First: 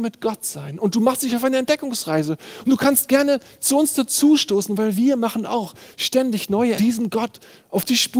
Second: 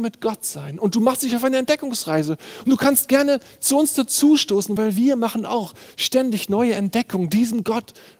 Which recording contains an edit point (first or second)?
first